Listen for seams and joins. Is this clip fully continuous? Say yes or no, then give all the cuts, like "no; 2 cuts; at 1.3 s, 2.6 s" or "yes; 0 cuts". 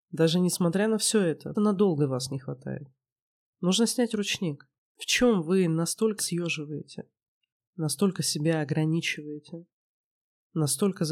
no; 3 cuts; at 1.5 s, 4.8 s, 6.2 s